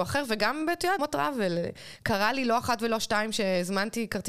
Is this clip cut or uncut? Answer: cut